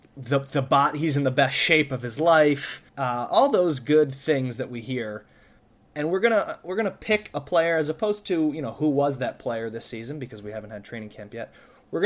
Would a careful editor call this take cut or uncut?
cut